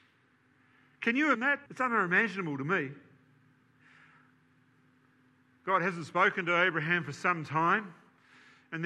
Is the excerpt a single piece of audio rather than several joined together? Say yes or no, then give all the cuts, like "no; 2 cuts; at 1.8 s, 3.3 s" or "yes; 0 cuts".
no; 2 cuts; at 1.4 s, 1.7 s